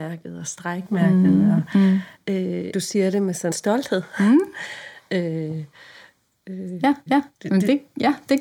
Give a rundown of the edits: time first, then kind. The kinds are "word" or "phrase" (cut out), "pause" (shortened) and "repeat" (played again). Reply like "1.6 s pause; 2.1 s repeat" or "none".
2.7 s word; 3.5 s word; 7.1 s repeat